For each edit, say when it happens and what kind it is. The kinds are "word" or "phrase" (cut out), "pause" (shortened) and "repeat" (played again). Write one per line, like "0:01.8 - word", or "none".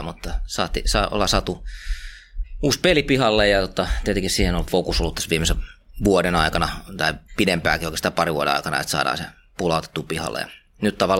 0:07.3 - pause